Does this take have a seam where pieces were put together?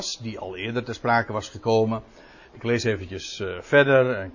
no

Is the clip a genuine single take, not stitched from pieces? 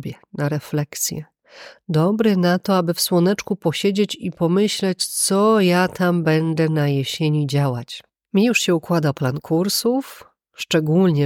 no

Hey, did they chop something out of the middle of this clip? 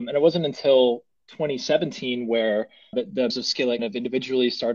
yes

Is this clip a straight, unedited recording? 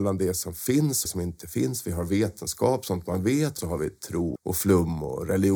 no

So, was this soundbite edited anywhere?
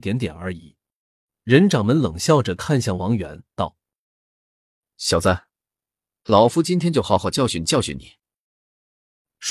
yes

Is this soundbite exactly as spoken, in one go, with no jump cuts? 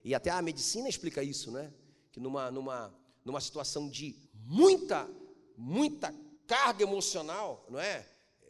no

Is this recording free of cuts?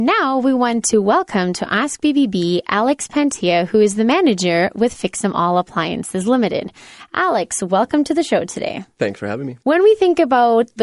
no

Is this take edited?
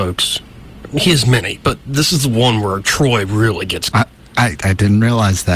yes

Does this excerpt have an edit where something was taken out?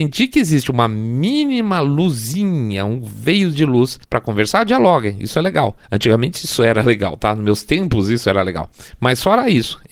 yes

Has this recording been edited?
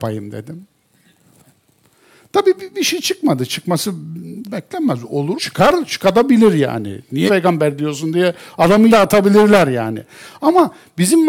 yes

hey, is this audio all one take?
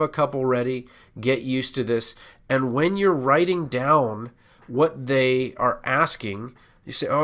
yes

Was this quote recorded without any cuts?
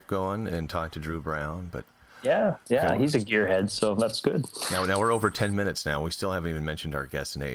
yes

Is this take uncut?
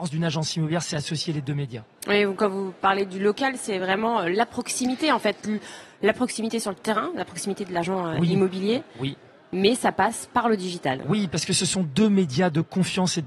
yes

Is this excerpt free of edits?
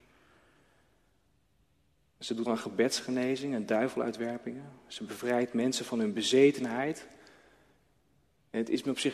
no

